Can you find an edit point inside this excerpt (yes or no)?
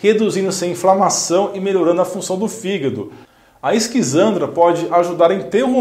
no